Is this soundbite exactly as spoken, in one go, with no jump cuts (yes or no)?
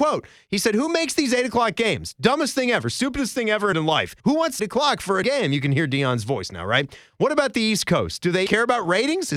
no